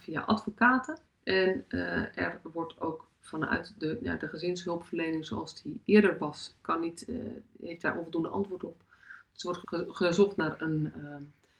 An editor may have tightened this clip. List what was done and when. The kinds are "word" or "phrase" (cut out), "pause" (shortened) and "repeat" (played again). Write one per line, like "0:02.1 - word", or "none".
0:01.0 - pause
0:09.6 - word

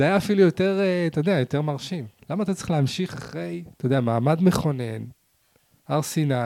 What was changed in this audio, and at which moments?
0:03.7 - pause

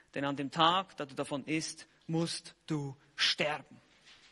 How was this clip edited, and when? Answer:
none

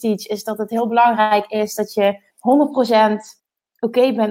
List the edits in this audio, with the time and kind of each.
0:02.3 - pause
0:03.4 - pause

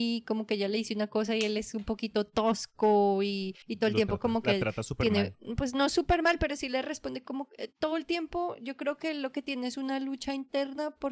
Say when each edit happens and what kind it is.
0:03.6 - pause

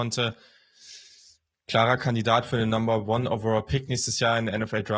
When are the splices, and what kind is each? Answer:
none

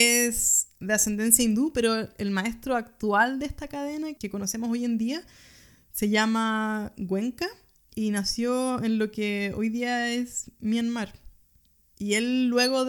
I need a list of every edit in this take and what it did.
none

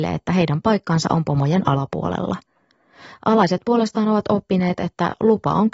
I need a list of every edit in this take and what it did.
none

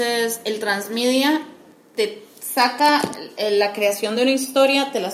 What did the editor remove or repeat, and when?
none

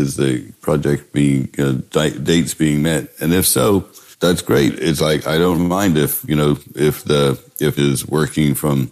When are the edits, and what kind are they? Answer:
0:04.1 - pause
0:05.6 - word
0:07.8 - phrase

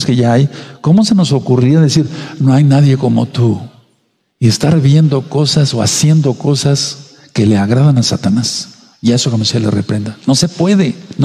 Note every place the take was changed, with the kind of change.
none

